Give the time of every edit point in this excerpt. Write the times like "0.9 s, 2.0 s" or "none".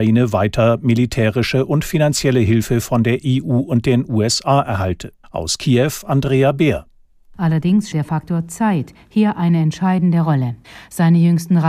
5.2 s, 7.9 s